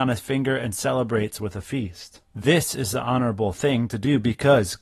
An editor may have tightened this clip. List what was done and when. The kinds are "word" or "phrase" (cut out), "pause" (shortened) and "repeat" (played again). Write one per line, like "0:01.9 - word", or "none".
0:02.2 - pause